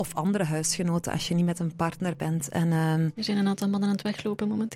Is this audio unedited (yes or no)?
yes